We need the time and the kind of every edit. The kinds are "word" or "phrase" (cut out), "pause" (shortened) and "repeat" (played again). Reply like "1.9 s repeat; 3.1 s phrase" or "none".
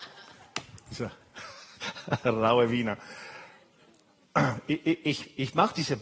none